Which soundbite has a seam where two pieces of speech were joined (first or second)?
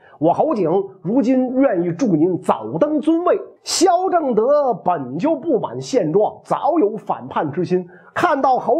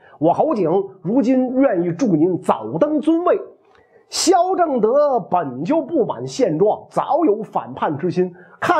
first